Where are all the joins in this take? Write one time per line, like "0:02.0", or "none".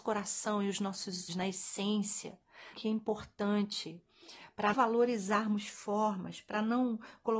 0:01.3
0:02.7
0:04.7